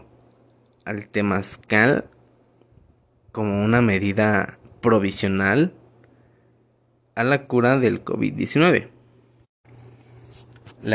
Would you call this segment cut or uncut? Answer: uncut